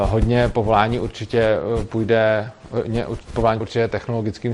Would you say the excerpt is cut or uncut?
cut